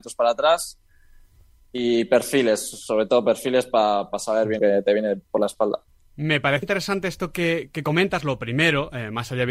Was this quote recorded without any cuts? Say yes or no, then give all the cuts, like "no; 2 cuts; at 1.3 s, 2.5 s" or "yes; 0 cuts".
no; 2 cuts; at 4.6 s, 6.6 s